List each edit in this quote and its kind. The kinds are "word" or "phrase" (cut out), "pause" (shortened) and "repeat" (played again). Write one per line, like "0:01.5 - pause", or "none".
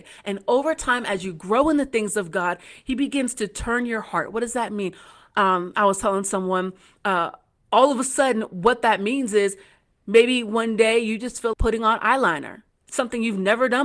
0:11.5 - word